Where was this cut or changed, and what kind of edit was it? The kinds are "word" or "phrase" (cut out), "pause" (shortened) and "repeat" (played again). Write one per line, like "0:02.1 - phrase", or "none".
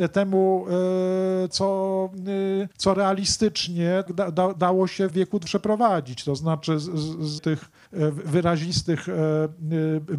0:01.5 - word
0:02.7 - pause
0:04.1 - word
0:05.1 - word
0:05.5 - word
0:07.4 - word
0:07.9 - pause